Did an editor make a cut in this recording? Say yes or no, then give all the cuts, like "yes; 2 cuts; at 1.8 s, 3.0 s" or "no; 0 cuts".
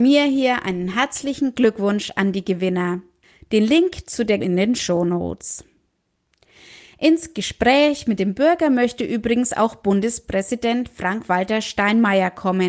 yes; 1 cut; at 4.4 s